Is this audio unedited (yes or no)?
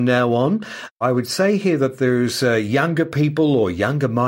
yes